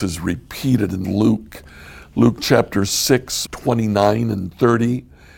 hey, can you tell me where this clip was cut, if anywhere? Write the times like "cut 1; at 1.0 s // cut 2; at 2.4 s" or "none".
cut 1; at 1.0 s // cut 2; at 3.5 s